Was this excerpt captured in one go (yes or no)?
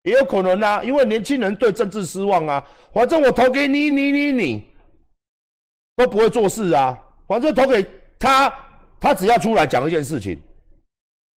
no